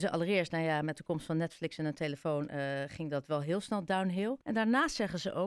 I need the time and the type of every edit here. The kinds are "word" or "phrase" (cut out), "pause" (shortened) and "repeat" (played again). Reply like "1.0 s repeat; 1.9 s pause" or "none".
4.4 s pause